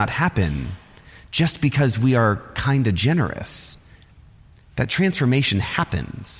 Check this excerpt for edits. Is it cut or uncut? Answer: uncut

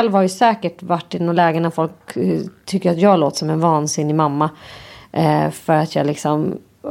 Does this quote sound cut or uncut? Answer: uncut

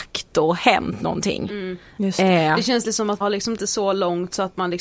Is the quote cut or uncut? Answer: cut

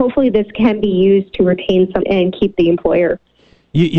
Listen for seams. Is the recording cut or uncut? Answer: cut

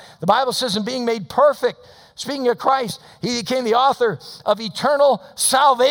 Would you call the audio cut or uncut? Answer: uncut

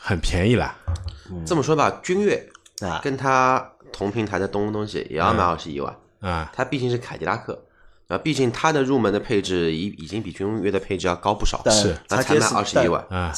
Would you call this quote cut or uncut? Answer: uncut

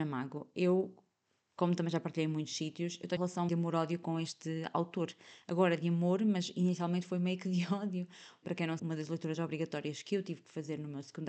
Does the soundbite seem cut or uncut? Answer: cut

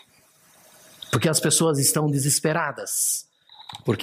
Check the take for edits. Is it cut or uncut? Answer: uncut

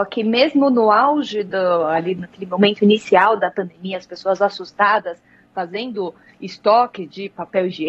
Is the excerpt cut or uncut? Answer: uncut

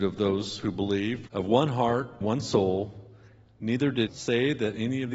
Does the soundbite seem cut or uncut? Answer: cut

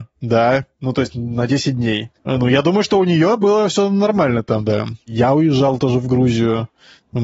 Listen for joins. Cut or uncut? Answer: cut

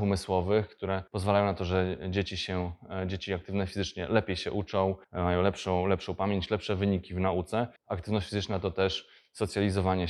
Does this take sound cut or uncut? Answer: cut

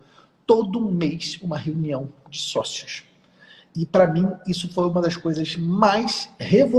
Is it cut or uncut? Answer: uncut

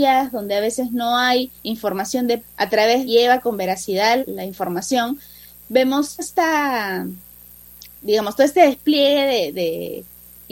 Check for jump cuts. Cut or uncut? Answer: cut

